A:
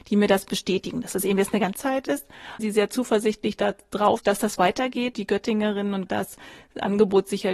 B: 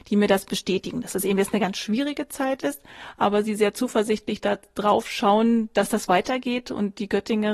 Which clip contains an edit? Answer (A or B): A